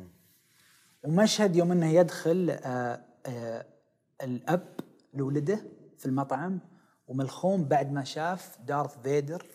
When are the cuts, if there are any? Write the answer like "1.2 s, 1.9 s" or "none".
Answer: none